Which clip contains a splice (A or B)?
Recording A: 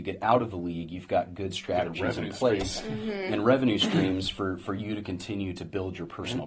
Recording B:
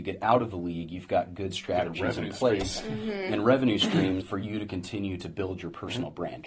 B